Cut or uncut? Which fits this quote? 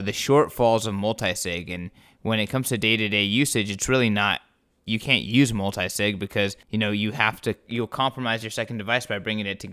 uncut